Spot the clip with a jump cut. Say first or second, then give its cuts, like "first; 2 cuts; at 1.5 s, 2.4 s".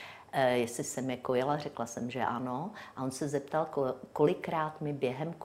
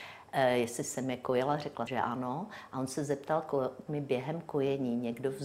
second; 2 cuts; at 1.9 s, 3.9 s